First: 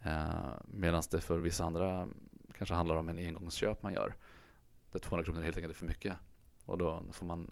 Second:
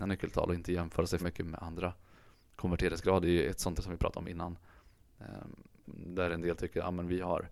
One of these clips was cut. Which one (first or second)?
second